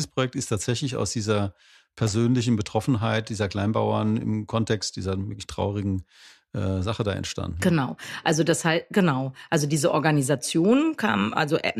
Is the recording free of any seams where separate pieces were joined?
yes; 0 cuts

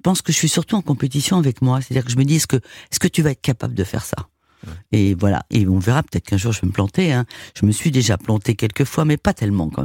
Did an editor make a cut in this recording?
no; 0 cuts

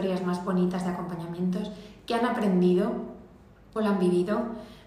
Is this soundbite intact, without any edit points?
no; 1 cut; at 3.8 s

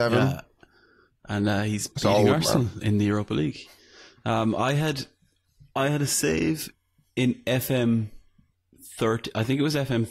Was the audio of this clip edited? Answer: yes; 1 cut; at 1.9 s

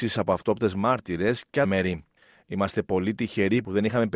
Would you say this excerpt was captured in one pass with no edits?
no; 1 cut; at 1.6 s

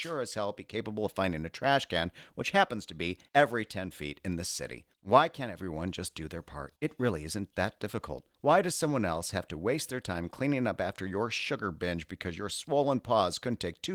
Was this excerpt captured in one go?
no; 4 cuts; at 3.3 s, 4.9 s, 6.7 s, 8.3 s

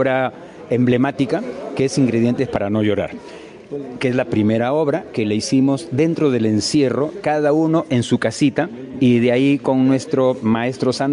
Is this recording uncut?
yes; 0 cuts

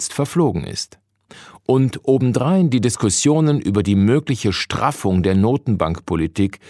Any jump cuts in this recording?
no; 0 cuts

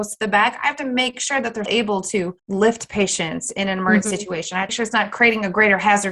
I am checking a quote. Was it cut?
yes; 3 cuts; at 1.7 s, 2.4 s, 4.7 s

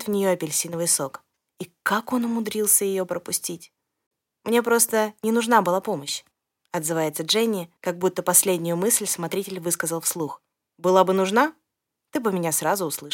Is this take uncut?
no; 5 cuts; at 1.4 s, 4.1 s, 6.3 s, 7.8 s, 10.5 s

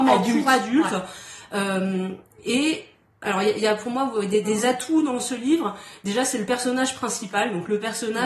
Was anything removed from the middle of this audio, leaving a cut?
no; 0 cuts

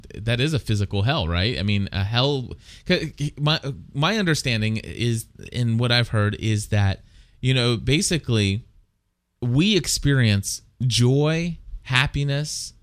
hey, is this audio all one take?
yes; 0 cuts

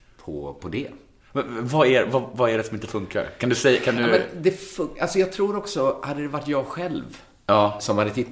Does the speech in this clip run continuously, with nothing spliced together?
yes; 0 cuts

